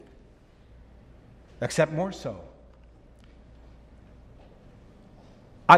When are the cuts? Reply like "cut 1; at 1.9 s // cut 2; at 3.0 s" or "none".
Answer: none